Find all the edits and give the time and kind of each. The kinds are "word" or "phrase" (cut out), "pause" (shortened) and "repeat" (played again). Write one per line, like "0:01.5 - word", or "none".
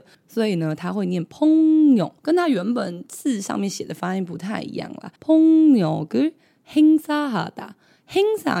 0:02.2 - pause
0:05.2 - pause